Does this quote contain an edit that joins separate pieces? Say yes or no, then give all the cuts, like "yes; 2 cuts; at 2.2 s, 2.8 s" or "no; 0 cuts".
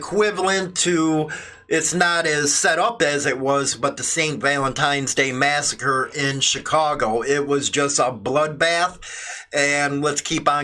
no; 0 cuts